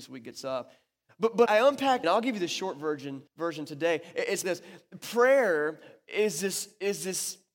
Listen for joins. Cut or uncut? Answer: cut